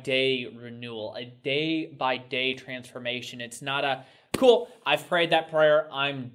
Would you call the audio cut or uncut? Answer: uncut